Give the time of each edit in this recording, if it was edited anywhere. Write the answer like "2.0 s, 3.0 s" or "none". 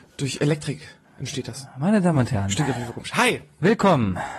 none